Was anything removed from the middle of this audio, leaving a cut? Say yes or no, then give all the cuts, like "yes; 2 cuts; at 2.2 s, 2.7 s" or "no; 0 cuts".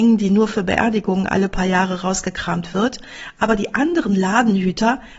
no; 0 cuts